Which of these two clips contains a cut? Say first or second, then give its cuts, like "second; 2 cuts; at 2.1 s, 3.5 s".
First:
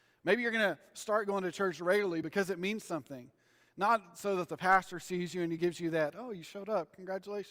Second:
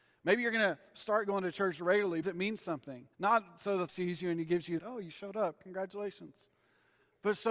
second; 4 cuts; at 2.2 s, 3.1 s, 3.9 s, 4.8 s